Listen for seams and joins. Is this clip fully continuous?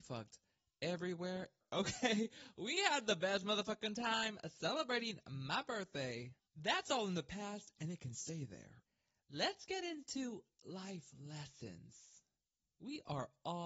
yes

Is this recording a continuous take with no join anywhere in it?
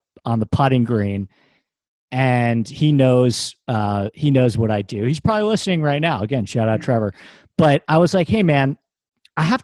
yes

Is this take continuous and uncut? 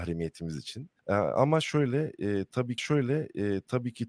no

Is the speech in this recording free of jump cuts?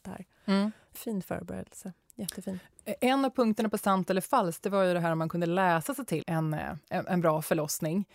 no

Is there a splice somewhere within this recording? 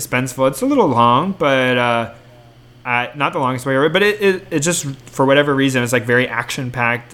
no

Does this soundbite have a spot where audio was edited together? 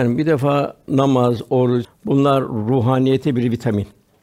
yes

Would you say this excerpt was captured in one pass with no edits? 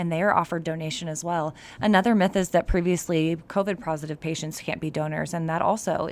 yes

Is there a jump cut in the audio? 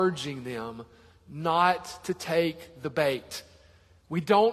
no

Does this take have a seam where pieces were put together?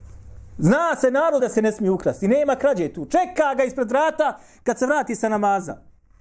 yes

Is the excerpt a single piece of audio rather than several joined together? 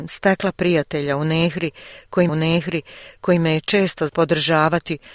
no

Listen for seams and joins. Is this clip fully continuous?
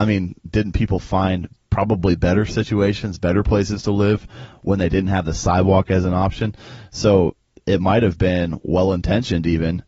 yes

